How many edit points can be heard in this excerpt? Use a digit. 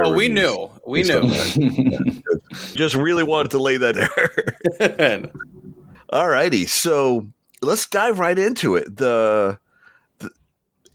2